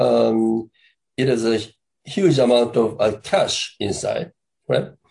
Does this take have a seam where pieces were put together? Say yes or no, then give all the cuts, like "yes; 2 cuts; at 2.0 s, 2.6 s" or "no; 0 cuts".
no; 0 cuts